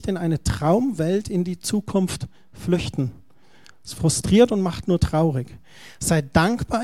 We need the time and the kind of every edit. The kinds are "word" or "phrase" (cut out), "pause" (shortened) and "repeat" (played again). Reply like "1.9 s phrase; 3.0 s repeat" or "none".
none